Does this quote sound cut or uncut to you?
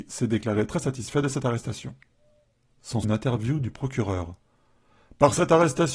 cut